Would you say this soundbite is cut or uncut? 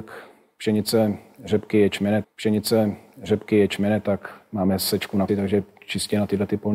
cut